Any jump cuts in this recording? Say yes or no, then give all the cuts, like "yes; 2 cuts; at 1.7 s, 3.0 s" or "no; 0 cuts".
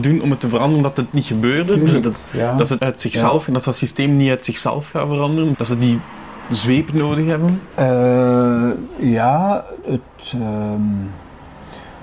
yes; 3 cuts; at 2.8 s, 5.5 s, 9.8 s